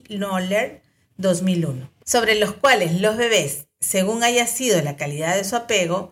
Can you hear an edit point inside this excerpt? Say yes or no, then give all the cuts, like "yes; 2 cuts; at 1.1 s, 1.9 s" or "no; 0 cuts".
no; 0 cuts